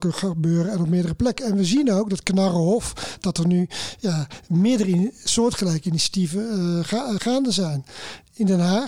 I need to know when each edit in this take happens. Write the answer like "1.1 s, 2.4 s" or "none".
none